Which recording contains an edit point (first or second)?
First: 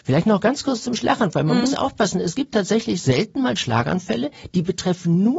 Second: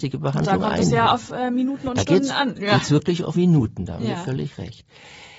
second